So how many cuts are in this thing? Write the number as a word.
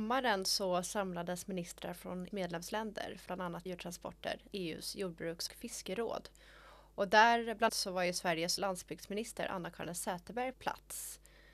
eight